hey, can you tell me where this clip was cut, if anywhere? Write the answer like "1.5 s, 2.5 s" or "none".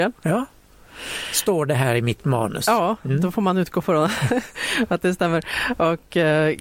none